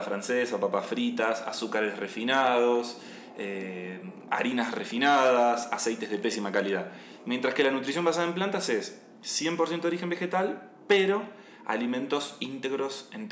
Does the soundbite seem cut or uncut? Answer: uncut